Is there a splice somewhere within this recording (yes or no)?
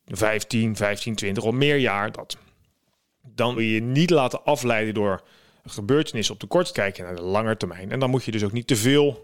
yes